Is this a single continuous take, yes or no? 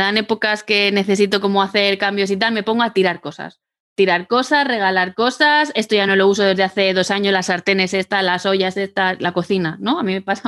yes